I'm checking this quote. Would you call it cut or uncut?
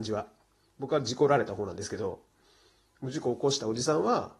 uncut